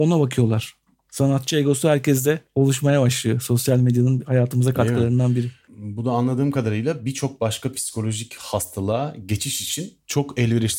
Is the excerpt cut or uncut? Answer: uncut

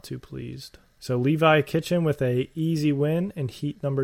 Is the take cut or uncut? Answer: uncut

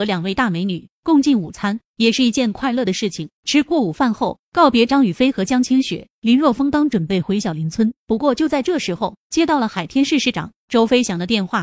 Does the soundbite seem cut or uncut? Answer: cut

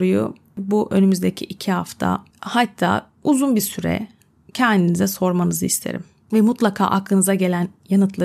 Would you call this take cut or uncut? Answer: uncut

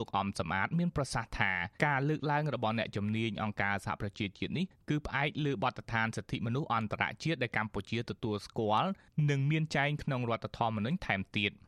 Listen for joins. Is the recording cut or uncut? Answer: cut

